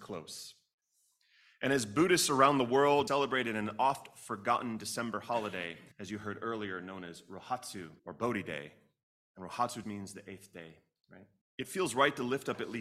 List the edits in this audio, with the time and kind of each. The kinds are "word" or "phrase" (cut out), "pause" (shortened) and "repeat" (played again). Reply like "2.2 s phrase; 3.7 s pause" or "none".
3.1 s word; 5.9 s pause; 8.0 s pause; 9.8 s word; 11.4 s pause